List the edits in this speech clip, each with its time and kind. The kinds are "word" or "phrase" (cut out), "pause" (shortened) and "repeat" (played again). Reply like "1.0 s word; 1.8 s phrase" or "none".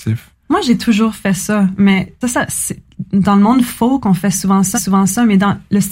2.2 s word; 4.7 s repeat